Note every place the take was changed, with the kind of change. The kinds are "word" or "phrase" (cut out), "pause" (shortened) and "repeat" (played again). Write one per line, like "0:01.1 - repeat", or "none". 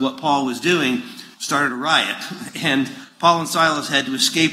0:01.3 - pause